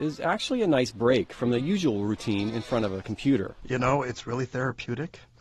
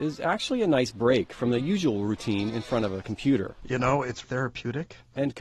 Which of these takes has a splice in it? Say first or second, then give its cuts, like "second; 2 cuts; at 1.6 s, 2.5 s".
second; 1 cut; at 4.2 s